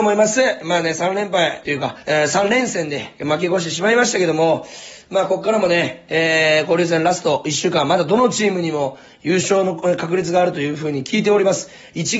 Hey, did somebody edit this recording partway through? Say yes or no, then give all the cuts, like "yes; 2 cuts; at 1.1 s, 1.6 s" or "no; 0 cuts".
yes; 2 cuts; at 1.6 s, 2.0 s